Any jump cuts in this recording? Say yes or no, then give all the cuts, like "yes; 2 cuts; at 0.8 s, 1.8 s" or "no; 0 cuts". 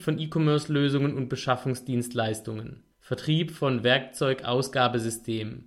yes; 1 cut; at 2.9 s